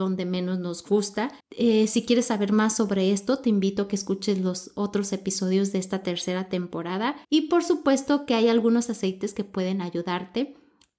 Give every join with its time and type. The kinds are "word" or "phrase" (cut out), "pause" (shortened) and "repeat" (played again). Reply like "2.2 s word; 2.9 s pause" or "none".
1.4 s pause; 7.2 s pause